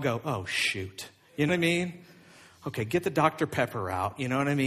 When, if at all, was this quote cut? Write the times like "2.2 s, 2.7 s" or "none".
1.5 s